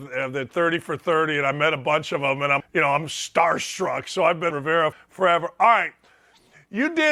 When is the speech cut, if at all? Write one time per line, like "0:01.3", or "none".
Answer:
0:02.6
0:04.5
0:04.9